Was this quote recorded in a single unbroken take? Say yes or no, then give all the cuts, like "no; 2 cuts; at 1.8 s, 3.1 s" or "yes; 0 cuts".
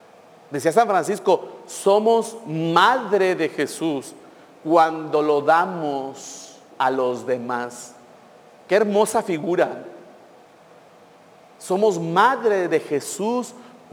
no; 1 cut; at 6.7 s